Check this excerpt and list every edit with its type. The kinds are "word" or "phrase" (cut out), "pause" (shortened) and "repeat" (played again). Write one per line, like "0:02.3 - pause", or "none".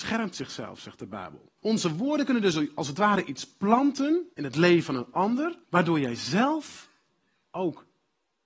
0:01.6 - pause
0:04.3 - pause
0:05.6 - pause